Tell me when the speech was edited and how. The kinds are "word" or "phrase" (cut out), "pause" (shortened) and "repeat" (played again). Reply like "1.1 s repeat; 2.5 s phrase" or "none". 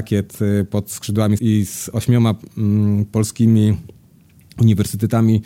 1.4 s word